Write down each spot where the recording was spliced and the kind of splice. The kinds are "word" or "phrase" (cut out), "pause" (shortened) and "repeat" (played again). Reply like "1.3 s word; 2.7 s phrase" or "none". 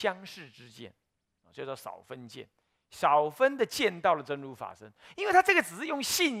none